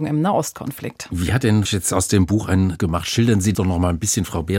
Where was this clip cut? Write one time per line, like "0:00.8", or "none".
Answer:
0:01.7
0:02.8
0:03.5